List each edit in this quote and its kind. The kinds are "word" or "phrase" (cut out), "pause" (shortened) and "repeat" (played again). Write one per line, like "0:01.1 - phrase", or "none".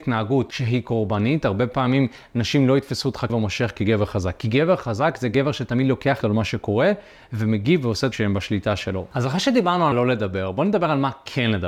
0:03.3 - word
0:06.2 - word
0:08.1 - word
0:09.9 - word